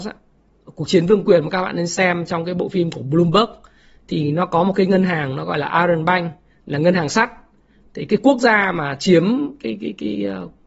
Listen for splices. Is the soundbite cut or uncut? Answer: uncut